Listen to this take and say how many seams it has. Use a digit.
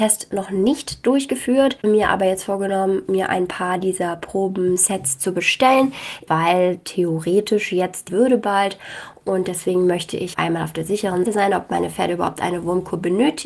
5